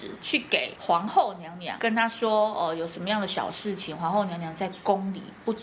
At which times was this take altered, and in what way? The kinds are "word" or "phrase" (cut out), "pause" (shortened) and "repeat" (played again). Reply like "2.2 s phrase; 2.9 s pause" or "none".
none